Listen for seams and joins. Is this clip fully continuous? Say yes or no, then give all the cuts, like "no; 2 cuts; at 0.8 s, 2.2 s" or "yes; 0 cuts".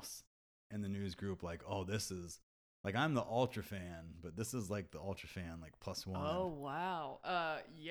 yes; 0 cuts